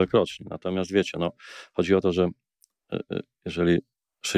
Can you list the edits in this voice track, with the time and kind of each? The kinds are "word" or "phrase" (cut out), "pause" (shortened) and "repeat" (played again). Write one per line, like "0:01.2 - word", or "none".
none